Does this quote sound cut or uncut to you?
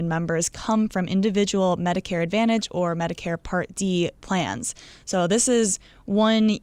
uncut